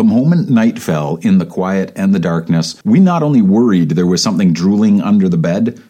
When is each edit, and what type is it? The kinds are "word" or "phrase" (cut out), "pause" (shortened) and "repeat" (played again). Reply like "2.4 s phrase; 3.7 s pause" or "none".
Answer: 2.8 s pause